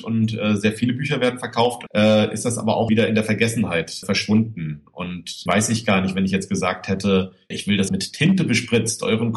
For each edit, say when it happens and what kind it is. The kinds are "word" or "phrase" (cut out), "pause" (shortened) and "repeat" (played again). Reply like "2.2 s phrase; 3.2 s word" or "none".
1.9 s word; 2.9 s word; 4.0 s word; 5.5 s phrase; 7.5 s word; 7.9 s phrase